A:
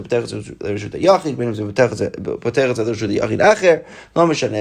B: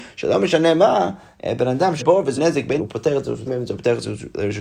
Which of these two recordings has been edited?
B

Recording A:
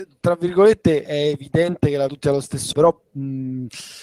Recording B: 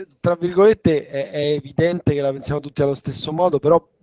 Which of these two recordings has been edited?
A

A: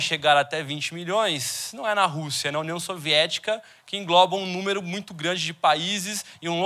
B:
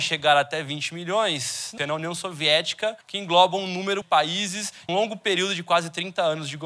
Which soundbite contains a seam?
B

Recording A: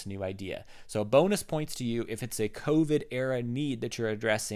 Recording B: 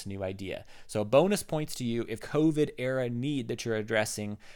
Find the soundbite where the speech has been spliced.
B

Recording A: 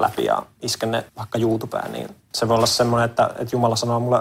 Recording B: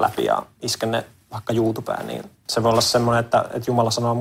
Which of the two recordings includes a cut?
A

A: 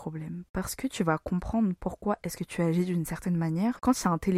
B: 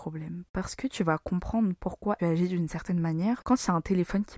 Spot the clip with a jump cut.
B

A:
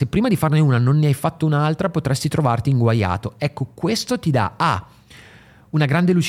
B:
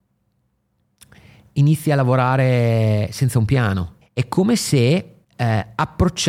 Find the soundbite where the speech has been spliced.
B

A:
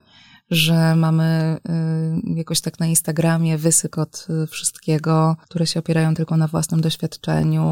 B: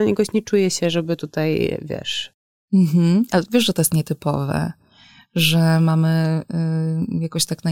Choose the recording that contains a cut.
A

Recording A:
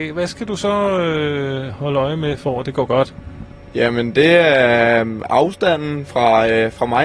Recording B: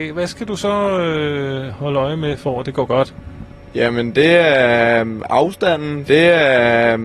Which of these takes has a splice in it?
B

